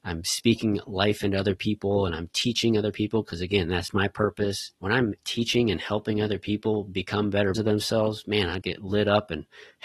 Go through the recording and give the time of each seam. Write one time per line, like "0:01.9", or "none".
0:04.7
0:07.5
0:08.6